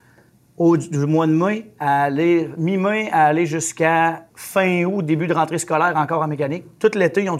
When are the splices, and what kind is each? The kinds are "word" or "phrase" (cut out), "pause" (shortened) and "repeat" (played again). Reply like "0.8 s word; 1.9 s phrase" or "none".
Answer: 4.3 s pause

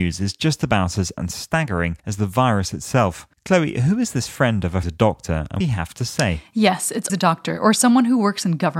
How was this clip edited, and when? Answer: 1.2 s word; 2.0 s pause; 3.3 s pause; 4.8 s phrase; 5.6 s phrase; 7.1 s word

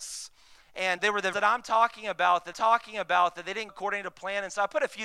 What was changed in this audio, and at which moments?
1.0 s word; 1.3 s word; 2.5 s repeat; 3.7 s word

